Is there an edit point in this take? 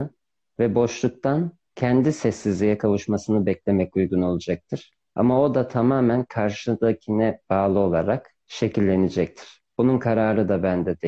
yes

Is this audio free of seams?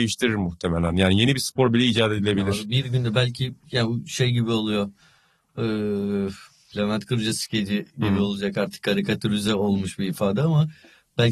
yes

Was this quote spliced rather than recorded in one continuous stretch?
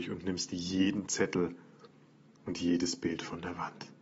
no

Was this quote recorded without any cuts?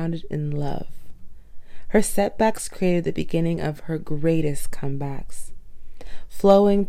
yes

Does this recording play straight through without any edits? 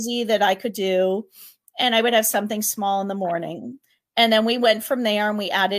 yes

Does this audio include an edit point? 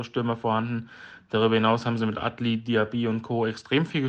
no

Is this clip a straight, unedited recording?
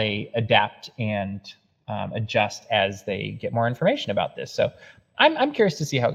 yes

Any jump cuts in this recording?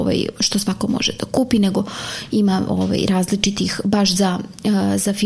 no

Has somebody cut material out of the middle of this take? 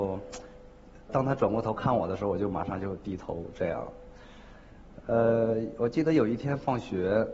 yes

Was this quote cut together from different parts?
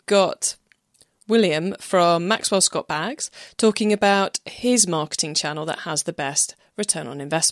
no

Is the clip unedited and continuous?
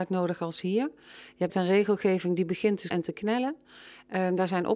no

